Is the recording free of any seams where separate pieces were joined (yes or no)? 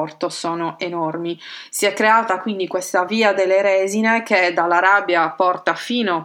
yes